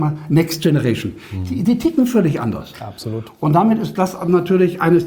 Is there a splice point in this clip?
no; 0 cuts

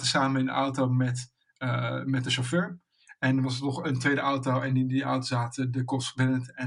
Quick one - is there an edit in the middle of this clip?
no; 0 cuts

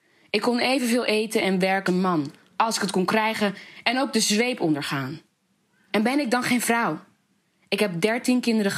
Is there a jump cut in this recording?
yes; 1 cut; at 1.9 s

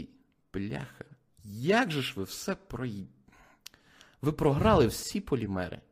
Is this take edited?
no; 0 cuts

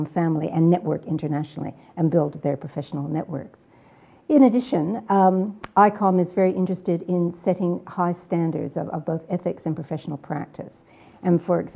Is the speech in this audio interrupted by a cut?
no; 0 cuts

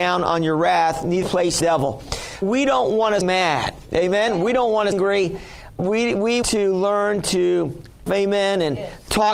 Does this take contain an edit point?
yes; 8 cuts; at 1.2 s, 1.6 s, 2.4 s, 3.2 s, 4.9 s, 5.8 s, 6.4 s, 8.1 s

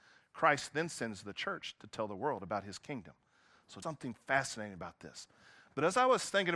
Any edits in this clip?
yes; 1 cut; at 3.8 s

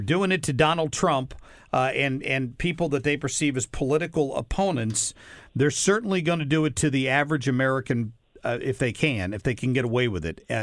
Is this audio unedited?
yes; 0 cuts

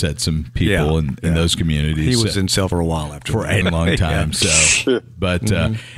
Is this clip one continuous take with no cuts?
no; 2 cuts; at 2.7 s, 3.6 s

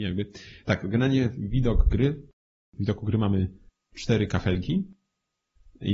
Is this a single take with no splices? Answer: yes; 0 cuts

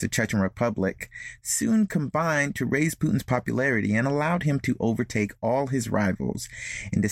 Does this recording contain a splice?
no; 0 cuts

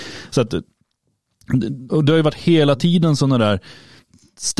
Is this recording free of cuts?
no; 1 cut; at 1.9 s

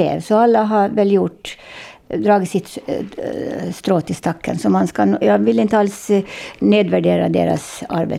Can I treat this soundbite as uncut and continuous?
no; 1 cut; at 5.2 s

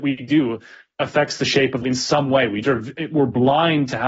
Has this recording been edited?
yes; 2 cuts; at 1.8 s, 2.6 s

